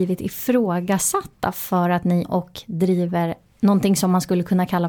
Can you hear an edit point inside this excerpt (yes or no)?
yes